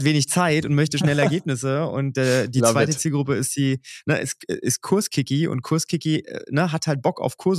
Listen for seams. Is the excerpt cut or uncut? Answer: uncut